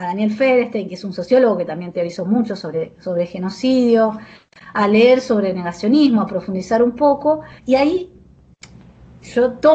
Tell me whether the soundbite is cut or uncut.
cut